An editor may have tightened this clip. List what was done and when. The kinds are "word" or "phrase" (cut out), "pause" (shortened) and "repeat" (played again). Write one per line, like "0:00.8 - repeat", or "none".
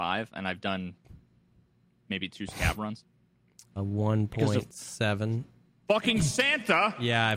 0:03.8 - word